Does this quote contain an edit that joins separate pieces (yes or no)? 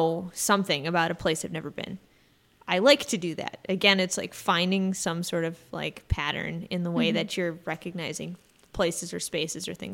no